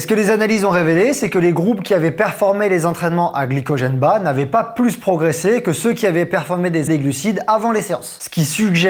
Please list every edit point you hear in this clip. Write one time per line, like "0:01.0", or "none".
0:06.9